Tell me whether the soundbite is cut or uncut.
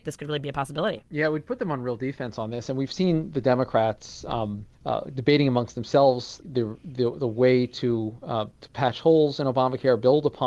cut